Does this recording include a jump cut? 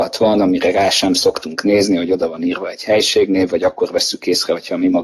no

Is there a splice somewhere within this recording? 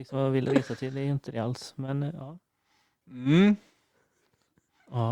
no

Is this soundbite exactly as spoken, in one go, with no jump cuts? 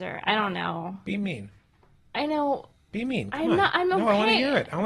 yes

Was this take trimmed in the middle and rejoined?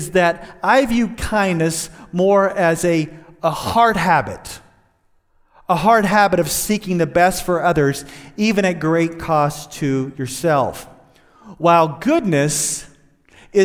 no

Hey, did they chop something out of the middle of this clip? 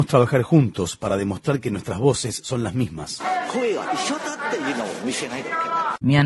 no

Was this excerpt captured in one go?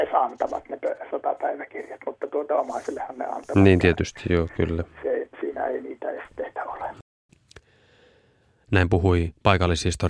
yes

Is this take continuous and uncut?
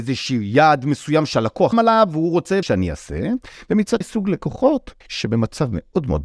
no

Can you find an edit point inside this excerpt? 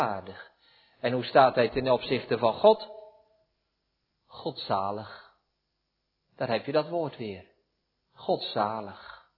no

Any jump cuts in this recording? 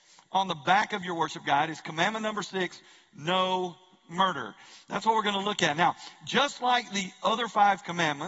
no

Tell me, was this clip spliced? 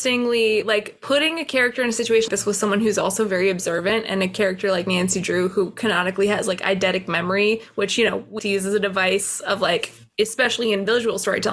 yes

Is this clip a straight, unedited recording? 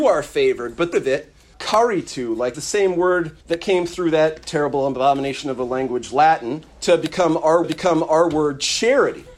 no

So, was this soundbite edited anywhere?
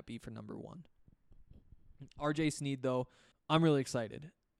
yes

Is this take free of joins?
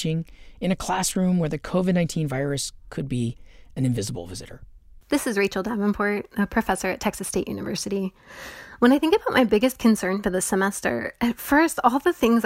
yes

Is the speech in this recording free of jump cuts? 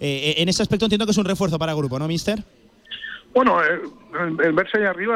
yes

